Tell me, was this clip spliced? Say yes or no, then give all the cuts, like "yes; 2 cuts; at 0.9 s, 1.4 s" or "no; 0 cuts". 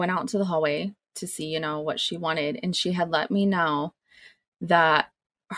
no; 0 cuts